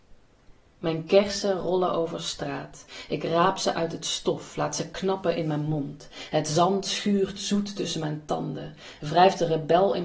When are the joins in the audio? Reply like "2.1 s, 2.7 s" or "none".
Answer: none

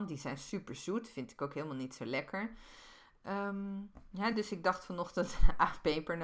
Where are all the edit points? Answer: none

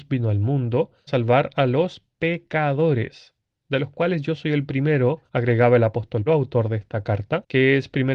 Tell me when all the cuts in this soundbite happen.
1.1 s, 5.3 s, 6.3 s

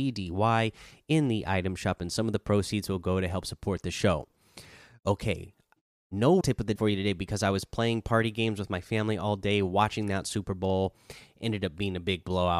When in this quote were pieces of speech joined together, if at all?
6.4 s, 6.8 s

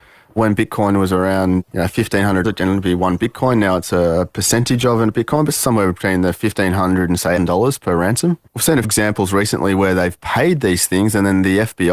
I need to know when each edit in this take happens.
2.4 s, 5.6 s, 7.4 s, 8.5 s, 8.8 s

